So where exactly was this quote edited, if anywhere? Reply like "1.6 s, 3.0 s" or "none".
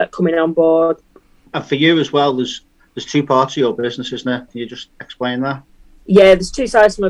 none